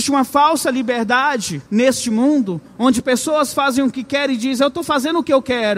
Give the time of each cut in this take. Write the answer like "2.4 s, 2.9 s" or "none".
1.7 s